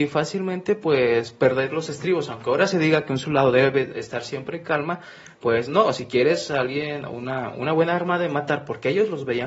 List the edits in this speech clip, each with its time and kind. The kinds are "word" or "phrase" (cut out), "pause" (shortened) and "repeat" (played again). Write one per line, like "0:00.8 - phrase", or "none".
none